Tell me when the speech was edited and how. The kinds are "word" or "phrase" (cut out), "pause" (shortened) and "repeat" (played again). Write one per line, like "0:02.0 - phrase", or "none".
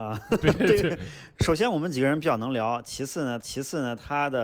0:03.4 - repeat